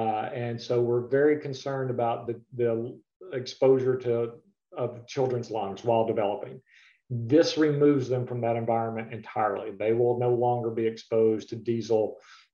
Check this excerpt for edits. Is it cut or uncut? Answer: uncut